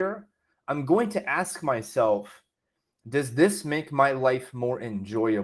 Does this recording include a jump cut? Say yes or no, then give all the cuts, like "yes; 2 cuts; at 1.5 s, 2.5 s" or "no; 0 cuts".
no; 0 cuts